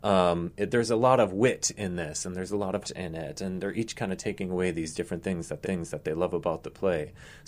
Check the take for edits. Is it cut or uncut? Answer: cut